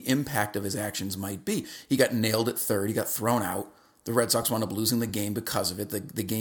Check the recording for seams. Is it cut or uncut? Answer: uncut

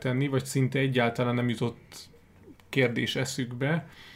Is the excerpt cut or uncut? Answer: cut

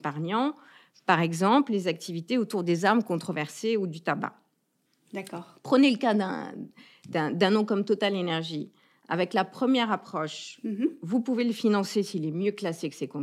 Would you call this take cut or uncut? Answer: uncut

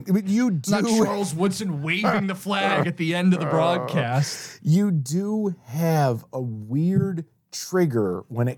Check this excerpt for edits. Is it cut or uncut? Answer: uncut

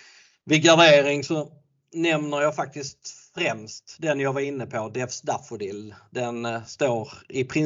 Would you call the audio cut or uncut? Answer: uncut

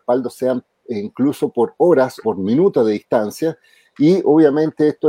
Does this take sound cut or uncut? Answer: cut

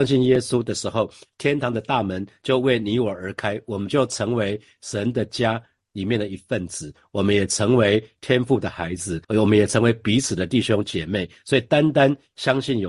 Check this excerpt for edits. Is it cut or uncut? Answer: cut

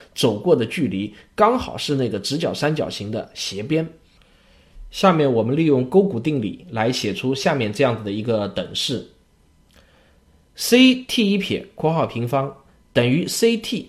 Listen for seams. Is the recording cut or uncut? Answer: uncut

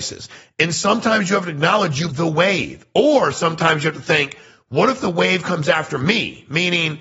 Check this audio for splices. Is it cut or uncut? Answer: cut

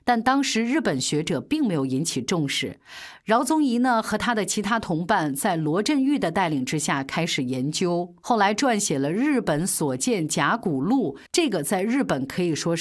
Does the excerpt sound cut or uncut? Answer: cut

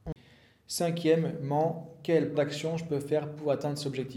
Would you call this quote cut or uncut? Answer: cut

